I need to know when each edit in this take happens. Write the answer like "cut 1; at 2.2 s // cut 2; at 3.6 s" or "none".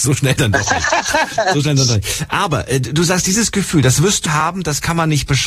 cut 1; at 4.3 s